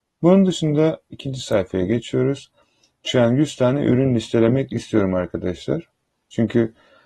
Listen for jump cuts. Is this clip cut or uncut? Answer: uncut